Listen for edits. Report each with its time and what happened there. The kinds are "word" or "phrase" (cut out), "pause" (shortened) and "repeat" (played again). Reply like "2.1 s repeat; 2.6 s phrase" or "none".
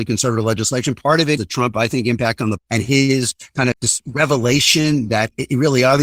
1.4 s word; 2.6 s word; 3.7 s word